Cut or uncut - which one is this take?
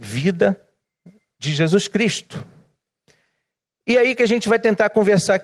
uncut